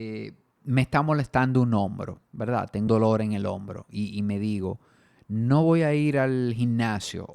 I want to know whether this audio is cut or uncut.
cut